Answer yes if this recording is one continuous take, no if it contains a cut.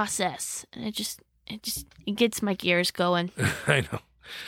yes